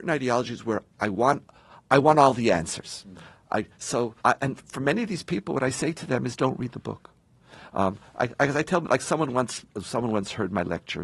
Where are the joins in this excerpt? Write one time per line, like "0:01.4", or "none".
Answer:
0:04.2